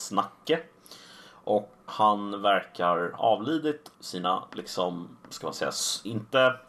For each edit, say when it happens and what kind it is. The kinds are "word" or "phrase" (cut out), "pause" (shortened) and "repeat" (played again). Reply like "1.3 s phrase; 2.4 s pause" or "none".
1.9 s word; 3.2 s word; 3.9 s word; 5.2 s pause

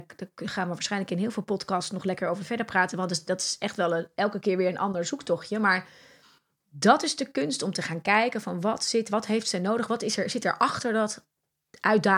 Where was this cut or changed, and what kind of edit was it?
none

